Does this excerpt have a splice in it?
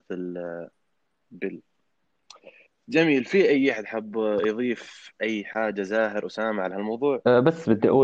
yes; 1 cut; at 2.7 s

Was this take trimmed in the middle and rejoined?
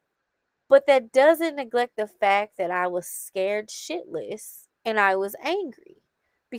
yes; 1 cut; at 4.7 s

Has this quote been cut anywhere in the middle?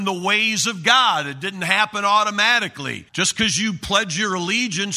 yes; 1 cut; at 3.1 s

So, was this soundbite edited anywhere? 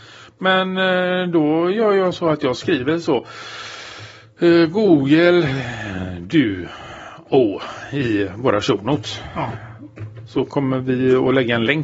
no; 0 cuts

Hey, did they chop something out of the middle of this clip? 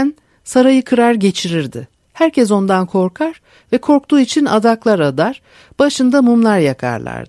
no; 0 cuts

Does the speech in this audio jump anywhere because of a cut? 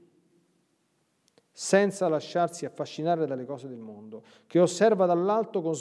no; 0 cuts

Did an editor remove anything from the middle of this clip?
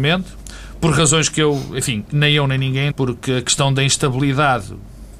yes; 1 cut; at 2.9 s

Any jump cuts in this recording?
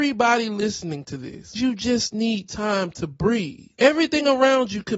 yes; 1 cut; at 1.6 s

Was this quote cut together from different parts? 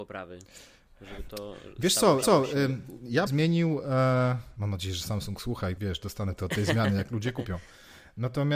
yes; 4 cuts; at 2.2 s, 3.3 s, 5.8 s, 6.4 s

